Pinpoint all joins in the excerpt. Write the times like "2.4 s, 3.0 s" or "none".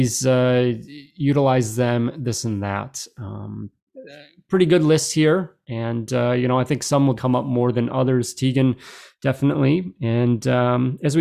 7.2 s